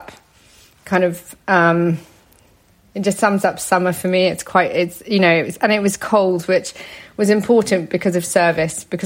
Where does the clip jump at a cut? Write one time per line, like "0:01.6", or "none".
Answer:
none